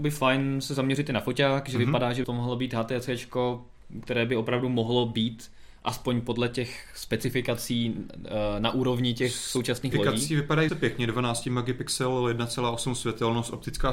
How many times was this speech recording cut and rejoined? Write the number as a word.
three